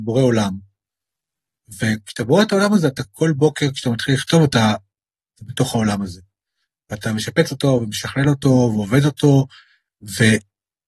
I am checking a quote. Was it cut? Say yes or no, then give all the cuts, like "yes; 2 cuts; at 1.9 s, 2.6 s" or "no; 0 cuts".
no; 0 cuts